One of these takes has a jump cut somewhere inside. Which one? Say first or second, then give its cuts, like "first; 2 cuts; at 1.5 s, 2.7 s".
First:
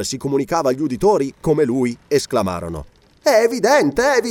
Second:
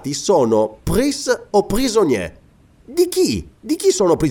first; 1 cut; at 1.4 s